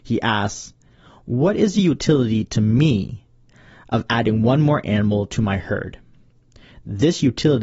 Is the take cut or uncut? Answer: uncut